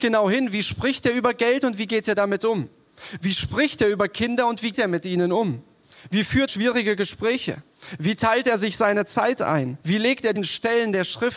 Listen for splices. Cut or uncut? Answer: cut